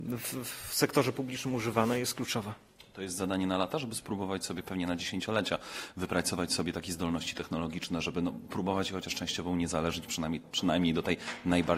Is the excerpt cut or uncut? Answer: uncut